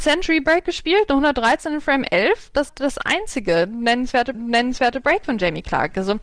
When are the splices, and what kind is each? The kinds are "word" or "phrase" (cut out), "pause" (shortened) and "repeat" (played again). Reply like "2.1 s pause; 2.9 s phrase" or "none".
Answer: 2.7 s word; 4.3 s repeat